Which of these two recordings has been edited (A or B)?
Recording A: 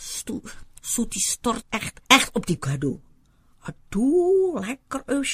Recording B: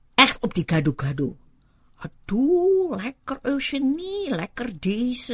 A